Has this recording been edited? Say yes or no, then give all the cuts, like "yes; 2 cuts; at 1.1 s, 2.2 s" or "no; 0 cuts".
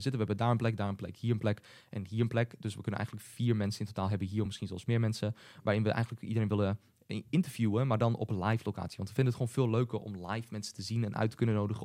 no; 0 cuts